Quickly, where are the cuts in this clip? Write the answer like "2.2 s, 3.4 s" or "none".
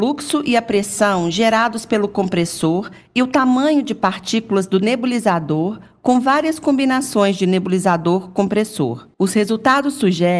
9.1 s